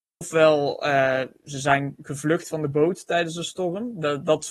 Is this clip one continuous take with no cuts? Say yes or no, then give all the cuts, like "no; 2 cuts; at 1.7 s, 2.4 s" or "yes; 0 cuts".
yes; 0 cuts